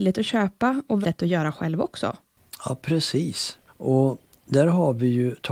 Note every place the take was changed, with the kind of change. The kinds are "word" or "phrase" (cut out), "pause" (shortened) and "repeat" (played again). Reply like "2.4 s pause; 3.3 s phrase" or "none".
1.0 s word